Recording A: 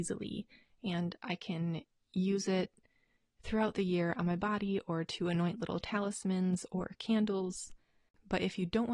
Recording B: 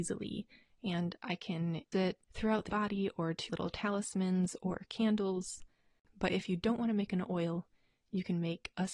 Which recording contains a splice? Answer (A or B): B